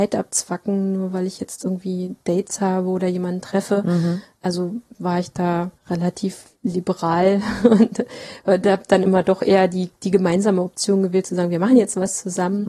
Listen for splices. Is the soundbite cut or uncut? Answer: cut